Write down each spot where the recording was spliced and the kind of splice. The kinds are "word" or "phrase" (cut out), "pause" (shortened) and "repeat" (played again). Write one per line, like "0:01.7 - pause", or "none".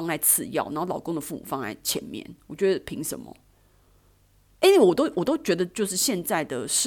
none

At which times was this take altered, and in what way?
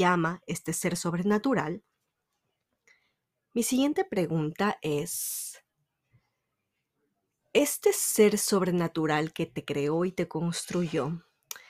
none

